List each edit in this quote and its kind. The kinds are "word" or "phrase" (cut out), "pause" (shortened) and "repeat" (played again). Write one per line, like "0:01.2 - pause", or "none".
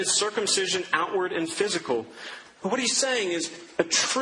none